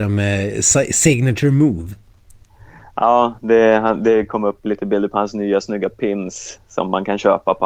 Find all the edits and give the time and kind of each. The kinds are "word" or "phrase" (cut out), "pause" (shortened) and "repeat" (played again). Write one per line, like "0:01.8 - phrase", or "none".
none